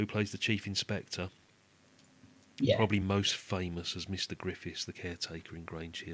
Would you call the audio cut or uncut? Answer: uncut